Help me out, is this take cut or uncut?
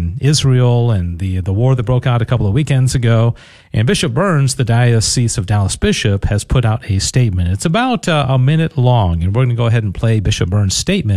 uncut